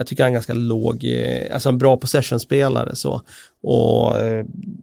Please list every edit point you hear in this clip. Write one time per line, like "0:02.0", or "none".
none